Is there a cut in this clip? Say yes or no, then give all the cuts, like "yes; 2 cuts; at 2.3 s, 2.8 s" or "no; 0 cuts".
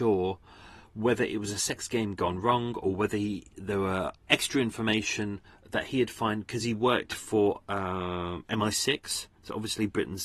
no; 0 cuts